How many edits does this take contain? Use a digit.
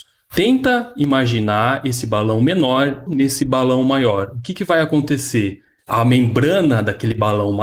1